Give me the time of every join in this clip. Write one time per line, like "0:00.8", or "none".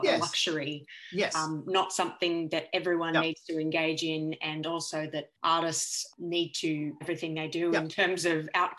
0:07.0